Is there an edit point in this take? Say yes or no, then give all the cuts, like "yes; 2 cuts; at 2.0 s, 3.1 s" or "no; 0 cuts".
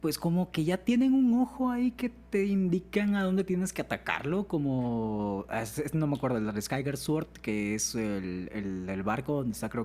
no; 0 cuts